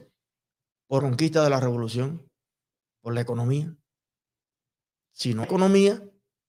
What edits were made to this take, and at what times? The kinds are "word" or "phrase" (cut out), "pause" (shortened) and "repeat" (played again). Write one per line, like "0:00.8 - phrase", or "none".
0:01.0 - word
0:05.4 - word

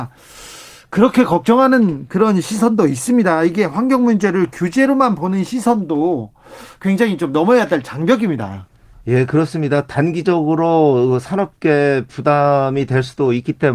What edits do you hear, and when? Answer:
none

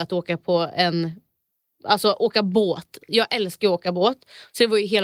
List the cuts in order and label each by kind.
none

